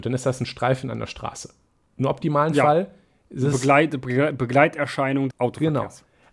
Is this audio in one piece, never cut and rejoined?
no; 1 cut; at 5.3 s

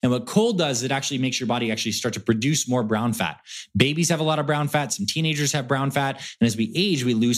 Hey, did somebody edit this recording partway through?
no; 0 cuts

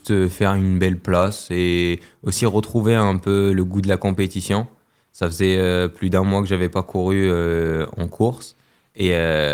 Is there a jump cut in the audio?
no; 0 cuts

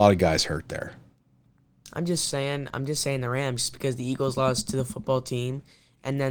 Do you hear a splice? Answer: no; 0 cuts

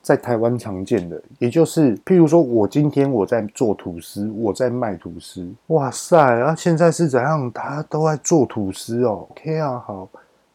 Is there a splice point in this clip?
yes; 3 cuts; at 2.0 s, 5.6 s, 9.3 s

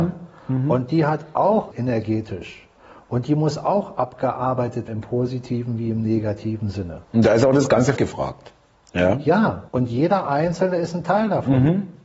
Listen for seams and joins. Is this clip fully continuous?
no; 5 cuts; at 1.7 s, 4.9 s, 7.0 s, 8.0 s, 9.7 s

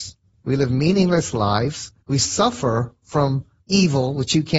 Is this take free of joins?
no; 2 cuts; at 2.0 s, 3.6 s

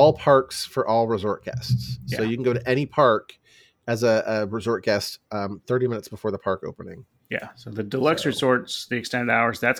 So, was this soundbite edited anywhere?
no; 0 cuts

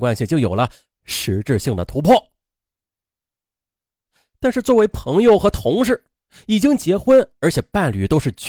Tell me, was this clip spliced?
no; 0 cuts

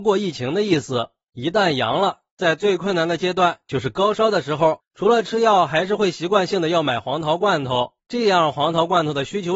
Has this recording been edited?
no; 0 cuts

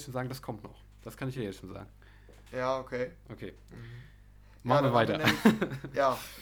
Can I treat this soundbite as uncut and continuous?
yes; 0 cuts

